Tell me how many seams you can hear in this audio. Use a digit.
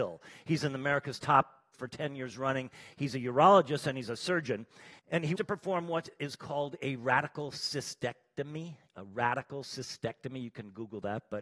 4